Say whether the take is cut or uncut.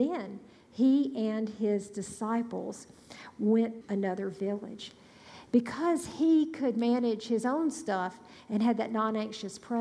cut